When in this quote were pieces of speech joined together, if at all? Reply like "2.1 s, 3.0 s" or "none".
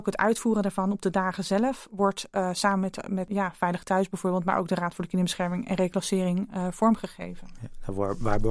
none